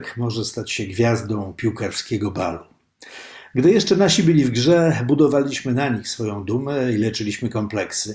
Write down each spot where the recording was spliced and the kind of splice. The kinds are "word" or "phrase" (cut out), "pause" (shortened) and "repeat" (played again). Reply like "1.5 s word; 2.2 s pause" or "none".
none

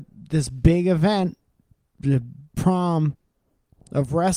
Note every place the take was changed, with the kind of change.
none

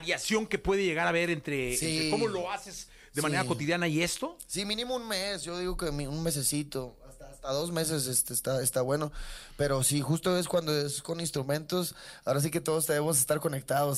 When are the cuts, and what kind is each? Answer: none

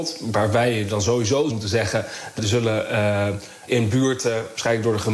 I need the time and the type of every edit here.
1.5 s word; 2.4 s word; 3.7 s word

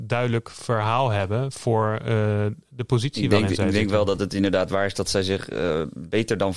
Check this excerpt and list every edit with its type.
none

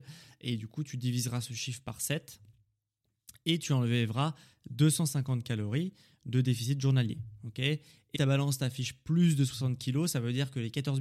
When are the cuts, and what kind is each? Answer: 8.2 s word

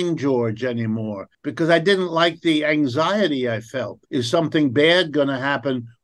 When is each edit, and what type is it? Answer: 1.3 s pause; 4.0 s pause

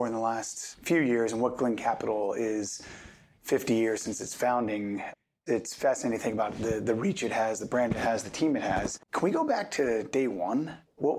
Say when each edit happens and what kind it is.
9.0 s pause

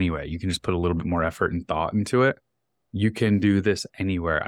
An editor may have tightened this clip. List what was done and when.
none

